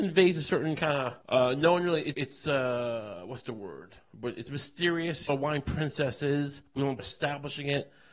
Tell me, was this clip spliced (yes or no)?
yes